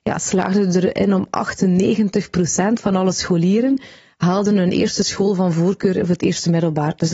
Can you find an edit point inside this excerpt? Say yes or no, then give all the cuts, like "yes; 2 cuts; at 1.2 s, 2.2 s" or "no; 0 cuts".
no; 0 cuts